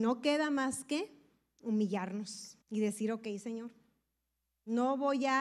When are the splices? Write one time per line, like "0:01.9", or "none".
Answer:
0:02.6